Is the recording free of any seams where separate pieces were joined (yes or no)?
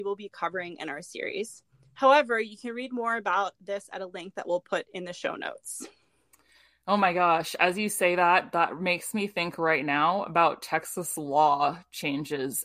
yes